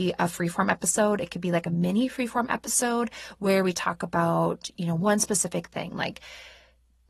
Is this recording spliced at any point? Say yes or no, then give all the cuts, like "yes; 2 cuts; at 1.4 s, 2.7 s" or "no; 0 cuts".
no; 0 cuts